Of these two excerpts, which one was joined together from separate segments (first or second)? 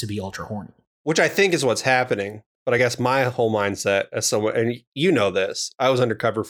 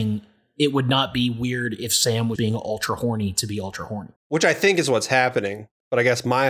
second